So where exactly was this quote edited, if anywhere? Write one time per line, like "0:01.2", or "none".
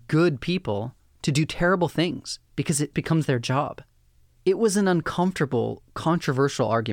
0:02.5
0:02.9